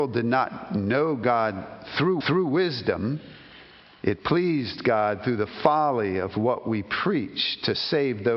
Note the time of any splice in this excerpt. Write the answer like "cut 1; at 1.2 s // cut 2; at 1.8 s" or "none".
cut 1; at 2.2 s